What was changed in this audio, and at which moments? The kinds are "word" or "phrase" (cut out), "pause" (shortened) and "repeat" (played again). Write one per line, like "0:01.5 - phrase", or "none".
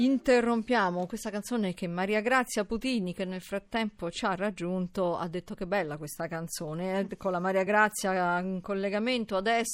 none